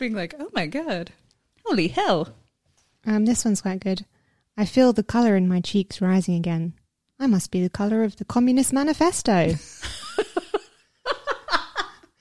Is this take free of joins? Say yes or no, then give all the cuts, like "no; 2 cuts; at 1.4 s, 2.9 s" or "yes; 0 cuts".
yes; 0 cuts